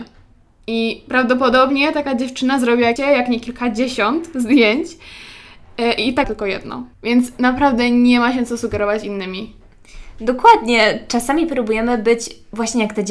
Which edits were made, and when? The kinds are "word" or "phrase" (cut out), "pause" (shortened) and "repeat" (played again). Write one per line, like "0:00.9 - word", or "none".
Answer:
0:03.0 - word
0:06.2 - word
0:06.9 - pause

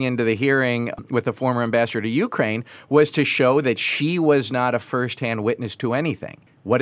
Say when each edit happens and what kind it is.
none

